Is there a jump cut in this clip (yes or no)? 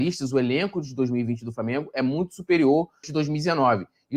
yes